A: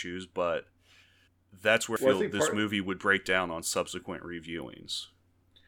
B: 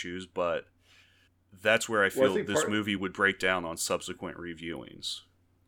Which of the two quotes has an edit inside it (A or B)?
A